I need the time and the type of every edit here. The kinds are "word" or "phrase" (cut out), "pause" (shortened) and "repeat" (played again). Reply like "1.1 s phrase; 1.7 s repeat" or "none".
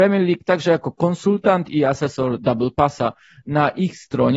none

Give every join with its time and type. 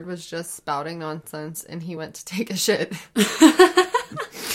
none

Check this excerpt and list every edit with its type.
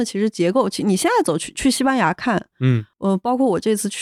2.9 s pause

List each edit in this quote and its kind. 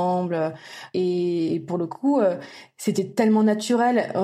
none

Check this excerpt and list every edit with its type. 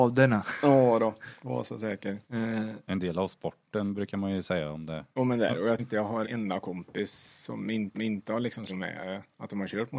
2.2 s pause; 5.1 s pause; 5.8 s word; 6.2 s word; 7.9 s repeat; 8.7 s word

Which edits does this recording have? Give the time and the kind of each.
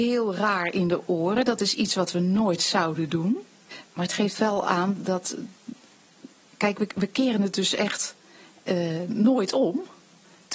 3.9 s pause

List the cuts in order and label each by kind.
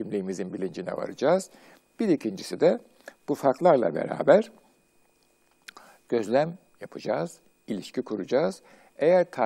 none

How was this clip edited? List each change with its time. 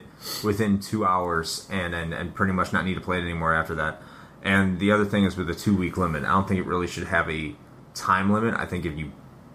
none

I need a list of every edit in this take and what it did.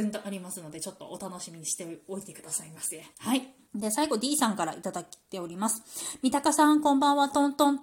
3.1 s pause; 3.6 s pause

